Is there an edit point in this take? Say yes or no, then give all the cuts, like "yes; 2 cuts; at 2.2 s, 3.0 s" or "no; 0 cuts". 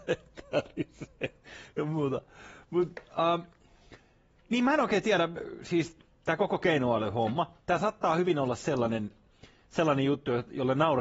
no; 0 cuts